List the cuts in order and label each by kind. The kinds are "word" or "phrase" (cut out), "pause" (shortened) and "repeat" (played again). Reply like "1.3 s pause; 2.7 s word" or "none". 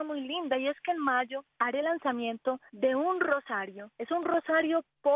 1.5 s pause; 2.7 s pause; 3.9 s pause